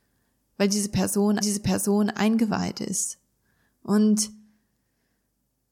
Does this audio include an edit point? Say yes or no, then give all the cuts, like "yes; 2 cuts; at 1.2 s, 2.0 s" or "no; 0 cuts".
yes; 1 cut; at 1.4 s